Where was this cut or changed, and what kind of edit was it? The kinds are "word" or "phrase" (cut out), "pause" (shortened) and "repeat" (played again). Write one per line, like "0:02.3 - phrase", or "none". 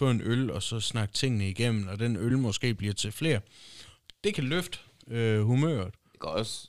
none